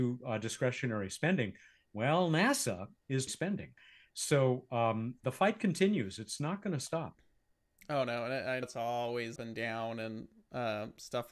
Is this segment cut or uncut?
cut